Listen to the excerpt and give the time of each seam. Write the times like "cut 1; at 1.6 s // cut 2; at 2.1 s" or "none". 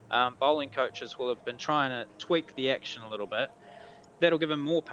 cut 1; at 1.4 s